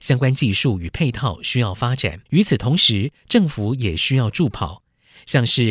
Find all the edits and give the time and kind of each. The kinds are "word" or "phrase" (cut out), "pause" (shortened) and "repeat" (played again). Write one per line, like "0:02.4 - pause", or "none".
0:02.3 - pause